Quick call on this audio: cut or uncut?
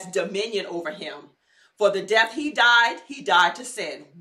uncut